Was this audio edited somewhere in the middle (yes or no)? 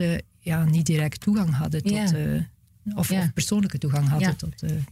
no